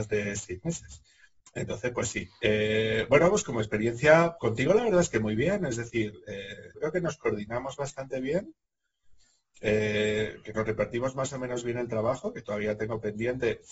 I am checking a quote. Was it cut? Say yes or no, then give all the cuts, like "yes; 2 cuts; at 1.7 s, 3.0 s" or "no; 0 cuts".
yes; 2 cuts; at 4.4 s, 6.7 s